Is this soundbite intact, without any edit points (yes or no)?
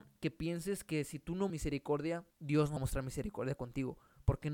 no